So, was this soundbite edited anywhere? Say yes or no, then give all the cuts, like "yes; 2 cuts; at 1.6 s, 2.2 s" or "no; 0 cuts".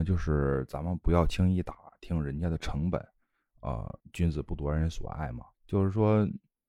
yes; 2 cuts; at 4.0 s, 5.5 s